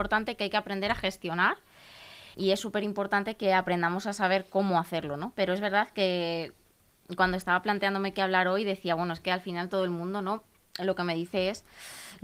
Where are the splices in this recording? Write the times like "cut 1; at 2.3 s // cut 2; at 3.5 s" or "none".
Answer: cut 1; at 2.3 s